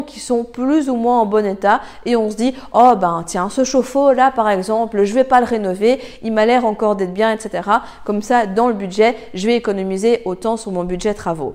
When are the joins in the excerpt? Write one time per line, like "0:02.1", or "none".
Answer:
none

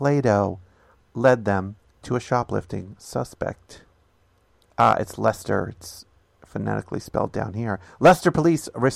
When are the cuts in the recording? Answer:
none

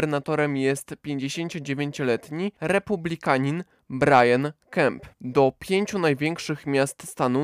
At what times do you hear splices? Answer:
0:05.1

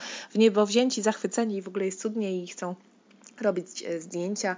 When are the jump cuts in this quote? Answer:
none

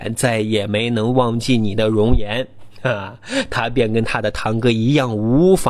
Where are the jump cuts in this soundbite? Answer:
none

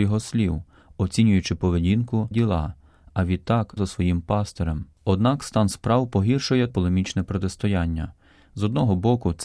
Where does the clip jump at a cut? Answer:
0:02.3
0:03.8
0:06.7

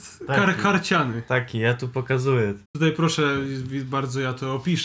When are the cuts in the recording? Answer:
0:02.7

